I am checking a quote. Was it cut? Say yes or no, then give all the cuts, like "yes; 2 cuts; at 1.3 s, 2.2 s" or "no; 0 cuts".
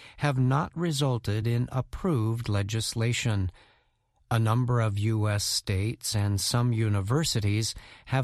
no; 0 cuts